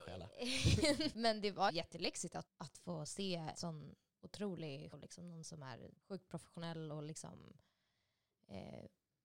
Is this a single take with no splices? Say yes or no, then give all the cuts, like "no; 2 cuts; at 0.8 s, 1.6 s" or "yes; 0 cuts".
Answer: no; 6 cuts; at 1.1 s, 1.7 s, 2.5 s, 3.5 s, 4.9 s, 6.0 s